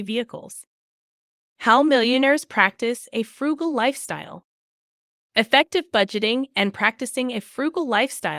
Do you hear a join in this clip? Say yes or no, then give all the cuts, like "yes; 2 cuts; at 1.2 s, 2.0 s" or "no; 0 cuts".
no; 0 cuts